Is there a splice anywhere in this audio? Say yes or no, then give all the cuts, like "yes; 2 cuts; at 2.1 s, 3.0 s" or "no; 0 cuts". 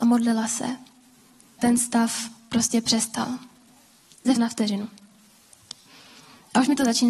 yes; 2 cuts; at 1.6 s, 4.4 s